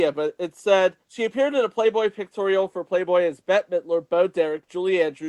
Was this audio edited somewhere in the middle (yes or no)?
yes